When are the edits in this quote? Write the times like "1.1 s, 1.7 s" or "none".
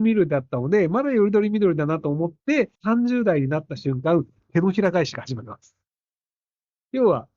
2.7 s